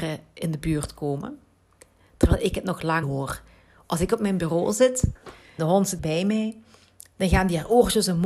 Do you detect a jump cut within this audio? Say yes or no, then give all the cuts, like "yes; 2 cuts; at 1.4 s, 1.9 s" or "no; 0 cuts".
yes; 3 cuts; at 3.0 s, 5.6 s, 6.0 s